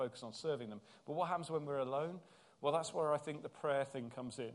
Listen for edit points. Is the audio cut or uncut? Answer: uncut